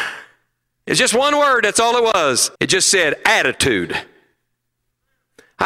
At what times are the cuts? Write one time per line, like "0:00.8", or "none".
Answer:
0:02.5